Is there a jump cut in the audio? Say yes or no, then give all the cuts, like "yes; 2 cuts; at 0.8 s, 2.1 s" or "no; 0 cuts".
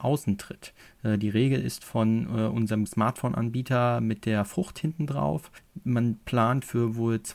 yes; 1 cut; at 2.9 s